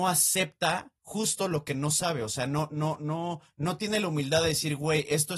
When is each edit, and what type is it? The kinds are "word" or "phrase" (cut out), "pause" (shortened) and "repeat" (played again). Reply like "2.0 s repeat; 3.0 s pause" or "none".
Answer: 1.0 s pause